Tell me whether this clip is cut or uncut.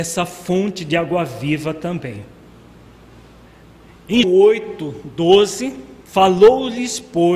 cut